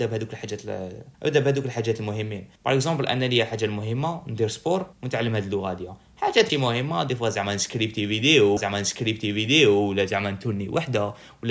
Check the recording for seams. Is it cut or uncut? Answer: cut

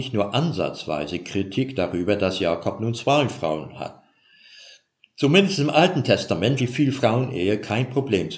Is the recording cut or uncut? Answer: cut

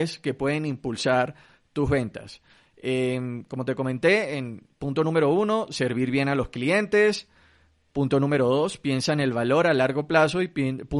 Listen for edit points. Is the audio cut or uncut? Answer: uncut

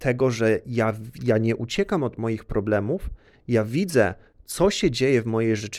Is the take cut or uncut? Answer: uncut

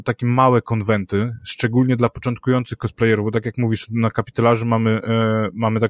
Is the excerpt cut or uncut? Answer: uncut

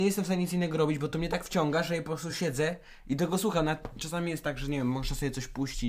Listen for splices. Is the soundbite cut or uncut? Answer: uncut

